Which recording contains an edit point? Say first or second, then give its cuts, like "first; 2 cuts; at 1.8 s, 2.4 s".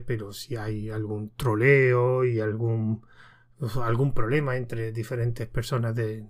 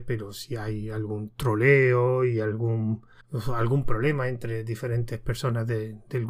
second; 1 cut; at 3.2 s